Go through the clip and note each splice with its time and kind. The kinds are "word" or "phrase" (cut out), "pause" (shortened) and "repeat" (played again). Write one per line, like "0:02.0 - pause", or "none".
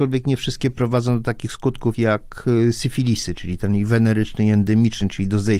0:01.9 - word